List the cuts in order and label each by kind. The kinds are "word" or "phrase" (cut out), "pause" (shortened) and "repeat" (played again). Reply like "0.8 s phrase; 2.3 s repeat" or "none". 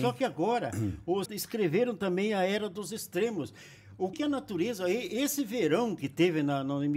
1.3 s word; 4.1 s word